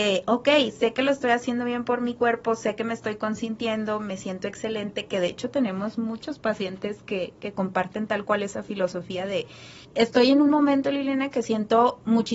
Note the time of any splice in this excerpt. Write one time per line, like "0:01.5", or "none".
0:09.8